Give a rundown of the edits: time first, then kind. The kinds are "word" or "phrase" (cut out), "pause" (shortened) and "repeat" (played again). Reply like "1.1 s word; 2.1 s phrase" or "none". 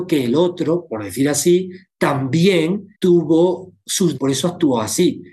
3.0 s pause; 4.2 s word